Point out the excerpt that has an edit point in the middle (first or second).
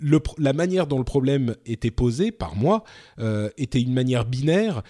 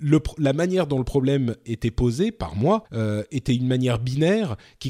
second